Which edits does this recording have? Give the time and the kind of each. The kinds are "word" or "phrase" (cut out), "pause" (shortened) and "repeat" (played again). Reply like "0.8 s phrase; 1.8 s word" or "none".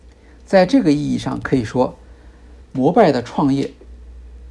2.6 s pause